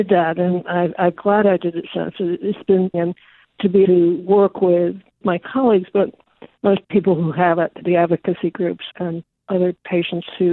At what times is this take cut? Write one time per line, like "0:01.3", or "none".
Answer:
0:01.2
0:02.9
0:03.4
0:03.8
0:05.2
0:06.8
0:07.8
0:08.9